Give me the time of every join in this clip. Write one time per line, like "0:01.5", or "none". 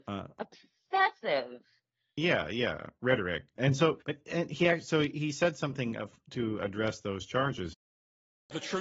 0:04.0